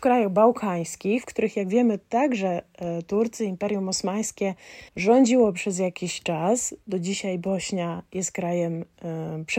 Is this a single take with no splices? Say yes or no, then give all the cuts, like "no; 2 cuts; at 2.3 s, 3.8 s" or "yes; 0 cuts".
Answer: no; 1 cut; at 4.9 s